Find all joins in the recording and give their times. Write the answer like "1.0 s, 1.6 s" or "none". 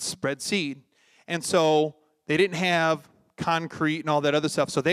none